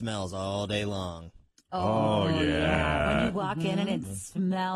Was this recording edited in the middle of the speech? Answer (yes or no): no